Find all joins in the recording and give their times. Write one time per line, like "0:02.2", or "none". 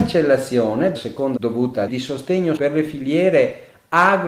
0:00.9
0:01.4
0:01.9
0:02.6